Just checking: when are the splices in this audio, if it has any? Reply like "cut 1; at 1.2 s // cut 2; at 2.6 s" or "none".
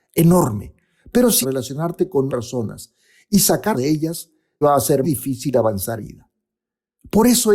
cut 1; at 1.4 s // cut 2; at 2.3 s // cut 3; at 3.7 s // cut 4; at 4.6 s // cut 5; at 5.0 s // cut 6; at 6.0 s